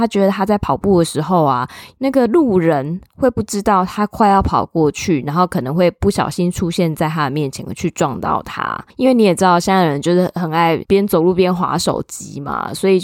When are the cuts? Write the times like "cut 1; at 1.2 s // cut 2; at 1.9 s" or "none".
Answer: cut 1; at 8.9 s